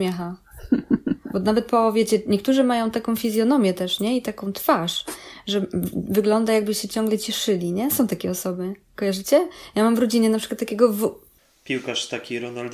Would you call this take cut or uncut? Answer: uncut